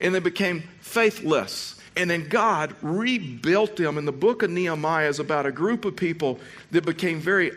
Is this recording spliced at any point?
yes; 1 cut; at 1.9 s

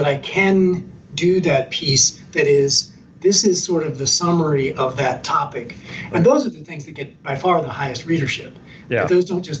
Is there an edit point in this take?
no; 0 cuts

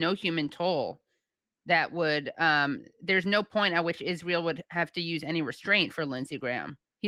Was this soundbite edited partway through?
no; 0 cuts

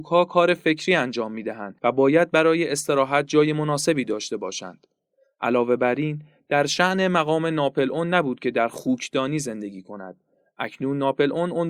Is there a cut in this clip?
no; 0 cuts

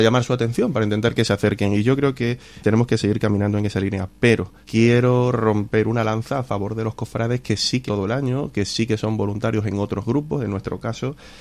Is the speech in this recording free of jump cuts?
no; 3 cuts; at 2.6 s, 4.6 s, 7.9 s

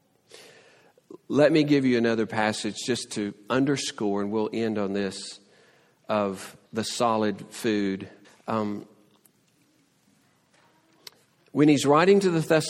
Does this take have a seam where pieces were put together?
yes; 2 cuts; at 6.7 s, 8.2 s

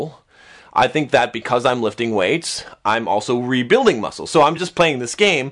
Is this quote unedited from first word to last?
yes; 0 cuts

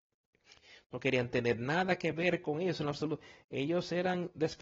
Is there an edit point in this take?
no; 0 cuts

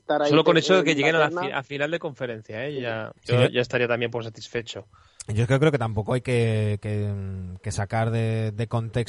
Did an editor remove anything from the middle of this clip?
yes; 1 cut; at 3.2 s

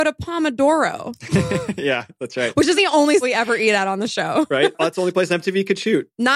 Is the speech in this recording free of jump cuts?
no; 2 cuts; at 2.8 s, 3.2 s

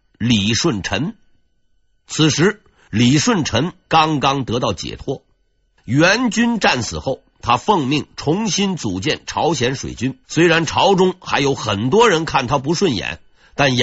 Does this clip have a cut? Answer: yes; 1 cut; at 10.2 s

